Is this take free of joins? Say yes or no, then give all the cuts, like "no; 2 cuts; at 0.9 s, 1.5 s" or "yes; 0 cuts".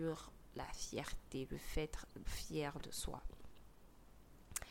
no; 1 cut; at 2.3 s